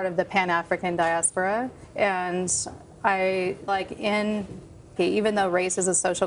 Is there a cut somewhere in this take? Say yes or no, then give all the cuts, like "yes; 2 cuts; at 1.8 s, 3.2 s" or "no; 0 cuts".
yes; 3 cuts; at 1.8 s, 3.7 s, 5.0 s